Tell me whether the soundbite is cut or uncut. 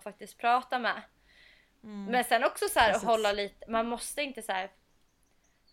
uncut